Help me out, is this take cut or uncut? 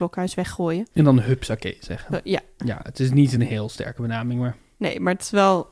uncut